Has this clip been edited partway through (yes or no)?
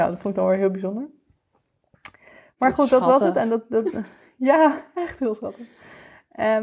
no